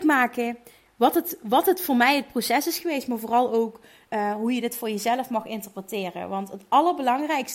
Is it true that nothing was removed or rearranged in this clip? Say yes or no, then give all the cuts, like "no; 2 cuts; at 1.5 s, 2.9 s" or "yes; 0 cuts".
yes; 0 cuts